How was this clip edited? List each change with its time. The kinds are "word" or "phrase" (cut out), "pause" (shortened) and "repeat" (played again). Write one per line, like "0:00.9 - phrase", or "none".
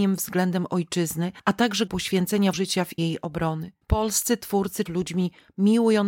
0:01.9 - word
0:02.5 - word
0:03.0 - word
0:03.8 - pause
0:04.9 - phrase